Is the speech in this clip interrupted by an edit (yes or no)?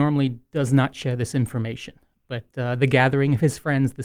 no